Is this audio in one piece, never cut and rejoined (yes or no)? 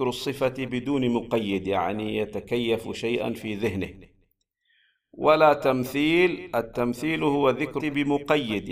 no